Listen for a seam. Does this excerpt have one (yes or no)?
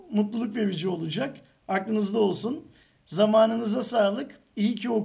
no